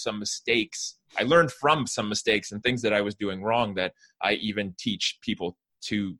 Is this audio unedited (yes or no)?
yes